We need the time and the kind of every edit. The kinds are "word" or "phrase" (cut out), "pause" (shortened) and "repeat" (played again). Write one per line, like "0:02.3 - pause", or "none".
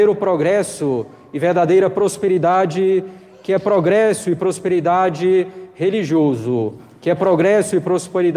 none